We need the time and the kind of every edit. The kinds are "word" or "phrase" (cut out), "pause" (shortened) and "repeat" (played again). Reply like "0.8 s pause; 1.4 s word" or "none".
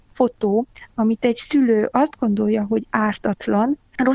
none